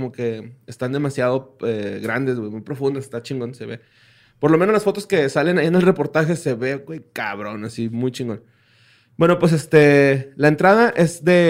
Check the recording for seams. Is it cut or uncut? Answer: uncut